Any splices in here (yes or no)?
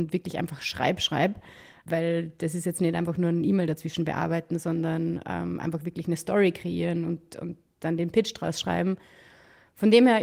no